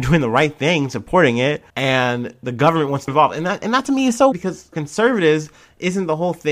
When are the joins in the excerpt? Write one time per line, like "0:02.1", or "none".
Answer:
0:01.7
0:03.1
0:04.3
0:04.7